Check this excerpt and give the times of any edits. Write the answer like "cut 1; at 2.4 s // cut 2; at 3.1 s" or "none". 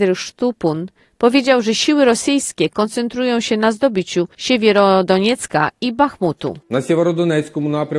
none